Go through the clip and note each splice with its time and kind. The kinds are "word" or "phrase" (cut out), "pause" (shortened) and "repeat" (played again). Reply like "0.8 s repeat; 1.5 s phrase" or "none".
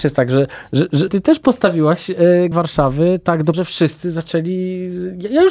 1.1 s word; 2.5 s word; 3.5 s word